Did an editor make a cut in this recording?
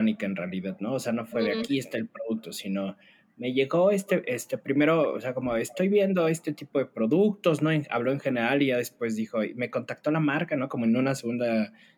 no; 0 cuts

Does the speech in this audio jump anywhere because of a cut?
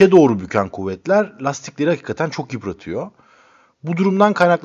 no; 0 cuts

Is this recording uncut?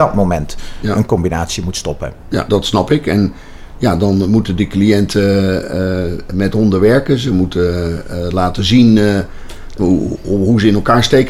no; 2 cuts; at 2.5 s, 9.8 s

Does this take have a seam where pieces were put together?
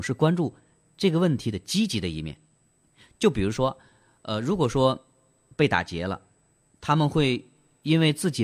no; 0 cuts

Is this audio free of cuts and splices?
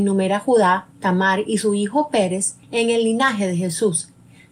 no; 1 cut; at 2.6 s

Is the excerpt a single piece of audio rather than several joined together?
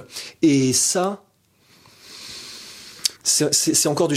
no; 1 cut; at 3.2 s

